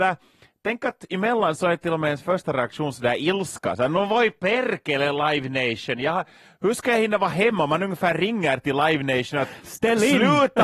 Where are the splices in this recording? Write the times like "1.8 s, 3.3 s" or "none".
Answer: none